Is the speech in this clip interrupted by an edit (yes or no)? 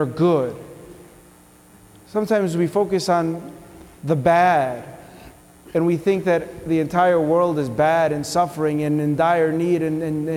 no